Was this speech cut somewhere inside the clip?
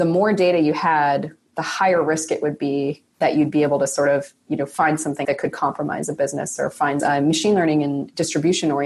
yes; 2 cuts; at 5.2 s, 7.0 s

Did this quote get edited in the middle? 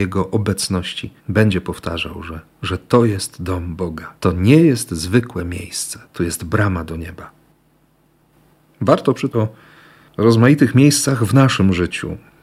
yes; 4 cuts; at 1.2 s, 4.2 s, 6.1 s, 9.3 s

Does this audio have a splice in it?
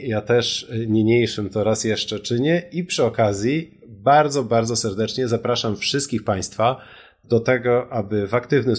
no; 0 cuts

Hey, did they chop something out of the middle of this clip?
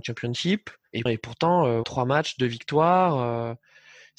yes; 2 cuts; at 1.1 s, 1.8 s

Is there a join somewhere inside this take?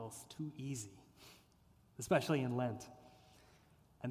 no; 0 cuts

